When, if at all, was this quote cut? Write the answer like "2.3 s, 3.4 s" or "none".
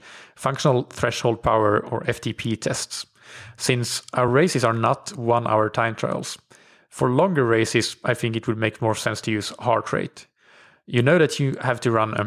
none